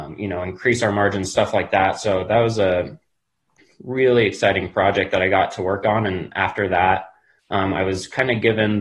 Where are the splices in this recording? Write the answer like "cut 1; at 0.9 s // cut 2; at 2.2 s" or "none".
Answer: none